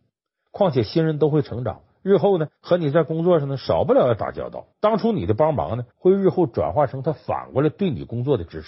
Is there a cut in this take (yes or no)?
yes